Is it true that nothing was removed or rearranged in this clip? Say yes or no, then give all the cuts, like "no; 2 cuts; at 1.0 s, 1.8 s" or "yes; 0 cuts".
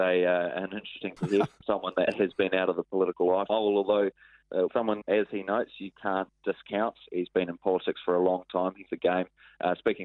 no; 5 cuts; at 1.2 s, 3.5 s, 4.7 s, 5.0 s, 8.9 s